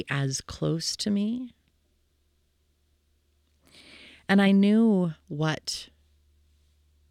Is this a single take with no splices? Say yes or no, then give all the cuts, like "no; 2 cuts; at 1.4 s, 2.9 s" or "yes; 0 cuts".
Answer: yes; 0 cuts